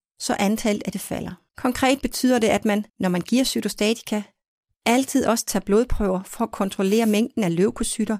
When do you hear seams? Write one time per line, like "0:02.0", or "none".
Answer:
0:00.9
0:01.5
0:02.9